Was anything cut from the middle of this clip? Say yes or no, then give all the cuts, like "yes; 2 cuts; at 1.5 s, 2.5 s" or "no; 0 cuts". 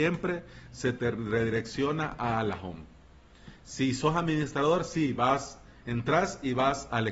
no; 0 cuts